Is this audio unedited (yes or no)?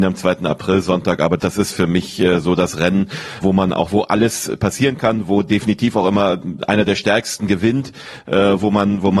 no